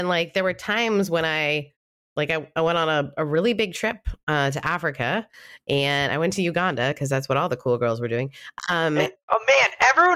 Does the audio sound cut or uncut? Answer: uncut